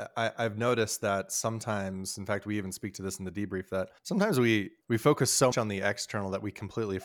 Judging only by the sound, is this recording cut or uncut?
cut